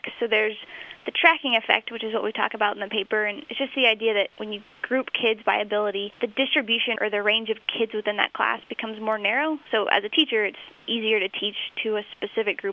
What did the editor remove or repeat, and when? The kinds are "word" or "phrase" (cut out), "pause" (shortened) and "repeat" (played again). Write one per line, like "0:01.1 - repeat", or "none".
0:04.3 - pause
0:07.0 - word
0:10.7 - pause